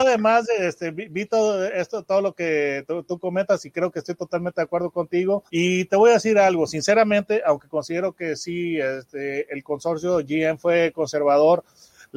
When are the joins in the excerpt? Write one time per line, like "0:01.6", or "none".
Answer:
0:05.5